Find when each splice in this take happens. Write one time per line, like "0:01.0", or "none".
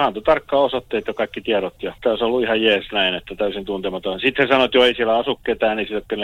0:02.0